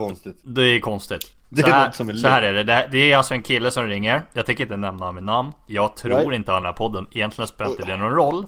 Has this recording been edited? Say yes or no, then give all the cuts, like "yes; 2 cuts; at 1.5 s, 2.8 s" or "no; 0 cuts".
yes; 2 cuts; at 1.4 s, 6.6 s